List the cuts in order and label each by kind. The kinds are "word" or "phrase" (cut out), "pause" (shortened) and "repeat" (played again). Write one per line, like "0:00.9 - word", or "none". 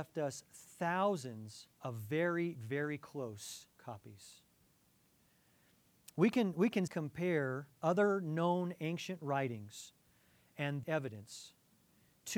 0:01.7 - pause
0:02.5 - word
0:03.7 - pause
0:06.9 - word
0:07.7 - pause
0:10.8 - phrase

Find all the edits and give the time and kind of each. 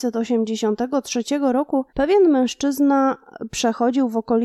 0:01.9 - pause

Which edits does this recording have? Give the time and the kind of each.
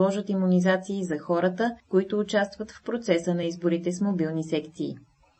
none

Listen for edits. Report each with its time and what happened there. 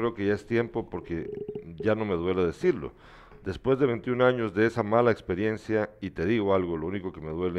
none

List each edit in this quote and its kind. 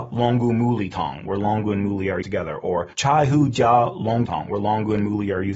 0:02.2 - word
0:02.9 - pause
0:04.3 - word

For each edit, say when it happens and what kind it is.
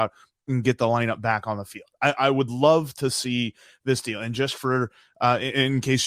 none

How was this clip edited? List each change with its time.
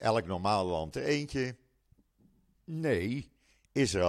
0:00.9 - word

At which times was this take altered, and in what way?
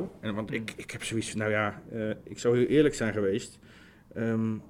none

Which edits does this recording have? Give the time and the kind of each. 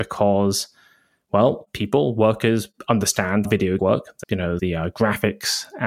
0:03.4 - word
0:03.8 - word
0:04.2 - word
0:04.6 - word

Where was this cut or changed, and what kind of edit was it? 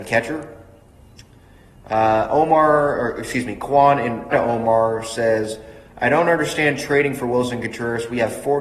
0:04.3 - word

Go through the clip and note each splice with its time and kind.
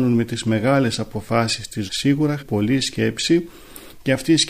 0:01.9 - word
0:02.4 - word

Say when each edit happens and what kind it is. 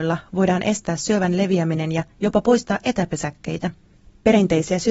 none

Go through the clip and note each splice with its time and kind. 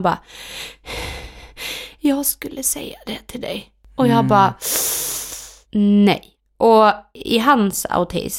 none

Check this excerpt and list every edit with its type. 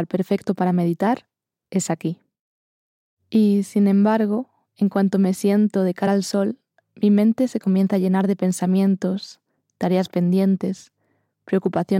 none

